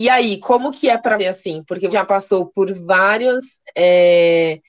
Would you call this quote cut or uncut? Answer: cut